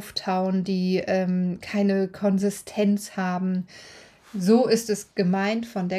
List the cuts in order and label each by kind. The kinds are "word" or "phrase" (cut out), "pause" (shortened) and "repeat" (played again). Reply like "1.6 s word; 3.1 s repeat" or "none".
none